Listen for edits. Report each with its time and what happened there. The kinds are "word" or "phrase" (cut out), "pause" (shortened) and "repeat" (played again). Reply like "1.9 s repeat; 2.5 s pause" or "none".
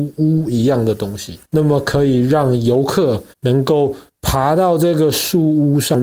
1.4 s pause; 3.3 s pause